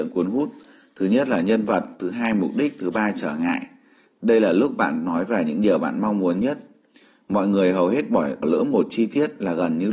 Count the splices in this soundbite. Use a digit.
1